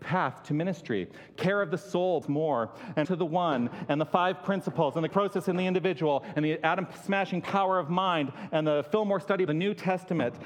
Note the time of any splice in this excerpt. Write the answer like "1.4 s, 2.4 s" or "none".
2.2 s, 3.0 s, 5.1 s, 9.5 s